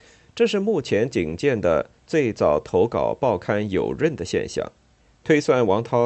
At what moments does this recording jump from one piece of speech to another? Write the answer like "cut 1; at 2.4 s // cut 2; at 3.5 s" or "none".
cut 1; at 5.0 s